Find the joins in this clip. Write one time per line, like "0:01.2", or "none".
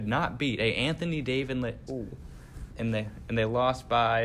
0:01.9